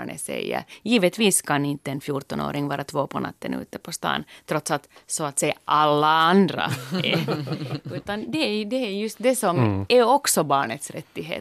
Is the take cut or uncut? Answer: uncut